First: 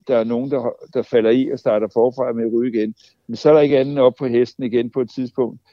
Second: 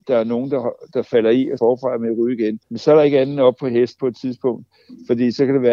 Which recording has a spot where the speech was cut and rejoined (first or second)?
second